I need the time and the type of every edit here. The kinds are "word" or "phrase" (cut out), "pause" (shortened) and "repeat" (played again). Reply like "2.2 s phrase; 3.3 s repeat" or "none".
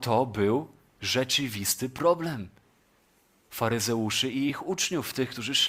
none